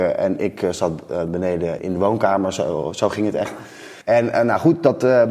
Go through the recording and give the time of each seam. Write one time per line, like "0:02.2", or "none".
0:01.3
0:01.8
0:04.0

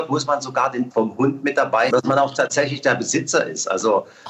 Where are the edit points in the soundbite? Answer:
0:00.9
0:01.9

